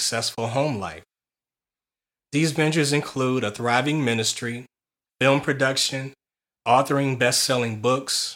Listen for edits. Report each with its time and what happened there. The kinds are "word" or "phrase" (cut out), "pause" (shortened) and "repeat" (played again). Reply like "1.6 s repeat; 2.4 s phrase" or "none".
none